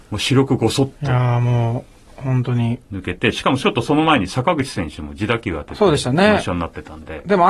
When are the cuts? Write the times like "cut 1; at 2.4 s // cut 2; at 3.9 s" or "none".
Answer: cut 1; at 2.8 s